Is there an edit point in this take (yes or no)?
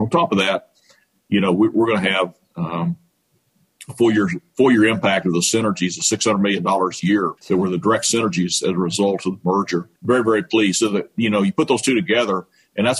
yes